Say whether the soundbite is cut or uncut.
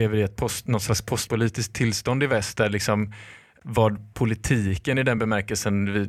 uncut